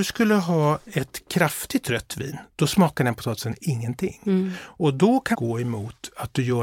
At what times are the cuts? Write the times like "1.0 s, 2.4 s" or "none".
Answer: 5.3 s